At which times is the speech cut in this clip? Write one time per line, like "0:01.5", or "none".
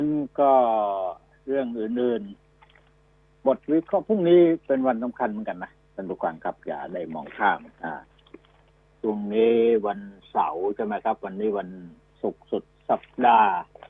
0:07.7